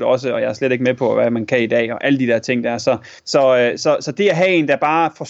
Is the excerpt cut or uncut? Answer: cut